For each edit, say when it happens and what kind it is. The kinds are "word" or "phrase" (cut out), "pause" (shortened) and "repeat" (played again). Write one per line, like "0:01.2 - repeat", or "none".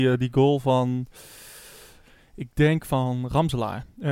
none